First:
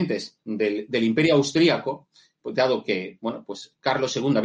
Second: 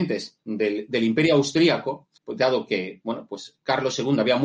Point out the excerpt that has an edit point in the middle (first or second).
second